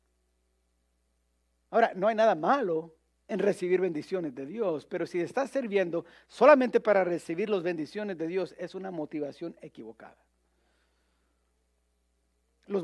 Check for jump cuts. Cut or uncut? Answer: uncut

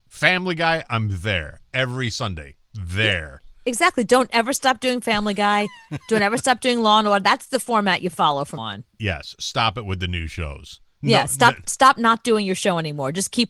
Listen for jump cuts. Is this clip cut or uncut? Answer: cut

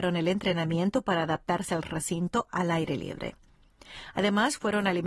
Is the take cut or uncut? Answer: uncut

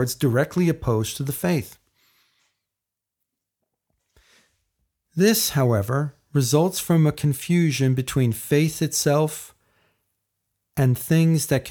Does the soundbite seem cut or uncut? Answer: uncut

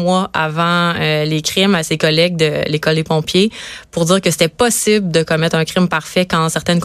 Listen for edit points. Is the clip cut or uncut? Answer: uncut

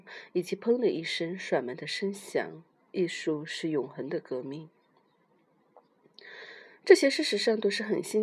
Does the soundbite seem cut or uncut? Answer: uncut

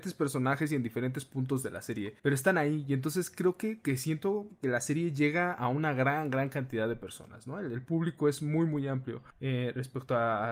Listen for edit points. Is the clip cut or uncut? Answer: cut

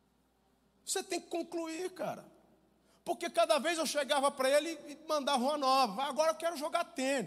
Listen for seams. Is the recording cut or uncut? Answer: uncut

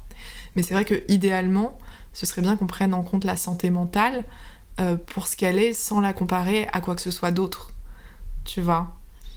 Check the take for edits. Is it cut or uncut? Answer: uncut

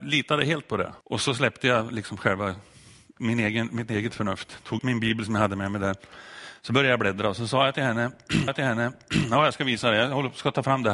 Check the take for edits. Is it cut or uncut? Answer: cut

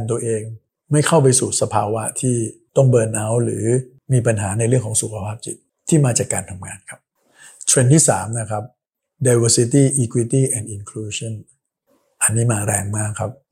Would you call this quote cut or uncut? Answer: uncut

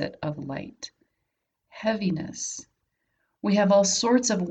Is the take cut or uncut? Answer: uncut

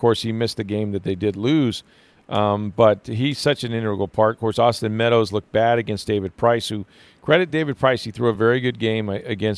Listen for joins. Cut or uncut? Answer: uncut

